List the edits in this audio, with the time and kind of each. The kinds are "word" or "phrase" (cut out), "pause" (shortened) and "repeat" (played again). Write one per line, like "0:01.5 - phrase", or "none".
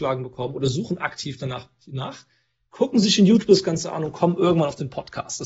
none